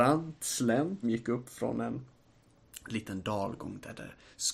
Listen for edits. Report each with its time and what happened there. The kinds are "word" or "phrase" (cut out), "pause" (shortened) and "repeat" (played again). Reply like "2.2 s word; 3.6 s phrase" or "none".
1.0 s word